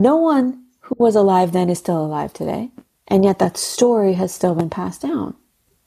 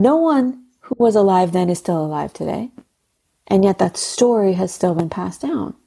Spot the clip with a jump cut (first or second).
first